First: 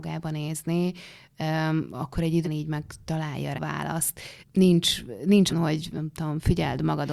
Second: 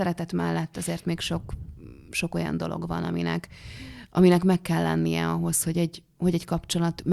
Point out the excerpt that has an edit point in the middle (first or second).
first